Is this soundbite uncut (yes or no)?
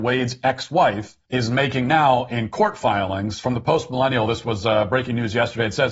no